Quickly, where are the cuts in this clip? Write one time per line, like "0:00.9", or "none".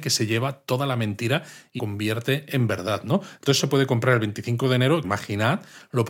0:01.8
0:03.6
0:05.0

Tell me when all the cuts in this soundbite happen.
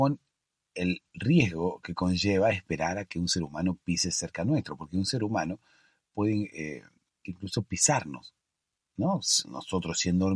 none

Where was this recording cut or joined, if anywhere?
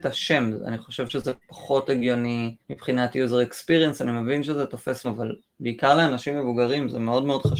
0:01.4
0:02.6
0:05.0

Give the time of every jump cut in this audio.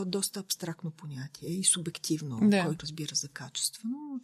0:02.8

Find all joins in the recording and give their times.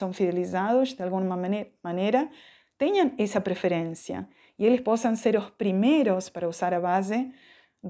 none

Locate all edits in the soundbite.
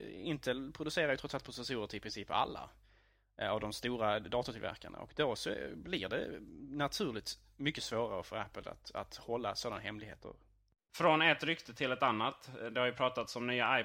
none

